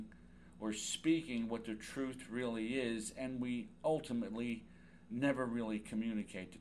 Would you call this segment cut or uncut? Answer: uncut